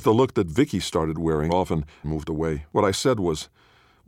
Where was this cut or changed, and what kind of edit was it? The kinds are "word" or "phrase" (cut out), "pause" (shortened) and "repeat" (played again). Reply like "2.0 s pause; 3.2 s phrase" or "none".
1.5 s word; 2.0 s phrase; 2.7 s pause